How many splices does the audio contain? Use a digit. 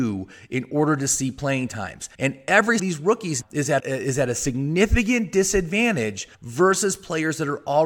5